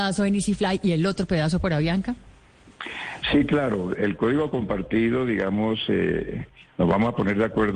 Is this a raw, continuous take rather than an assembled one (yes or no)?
yes